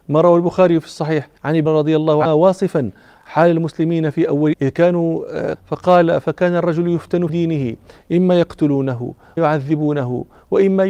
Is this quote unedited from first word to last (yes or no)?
no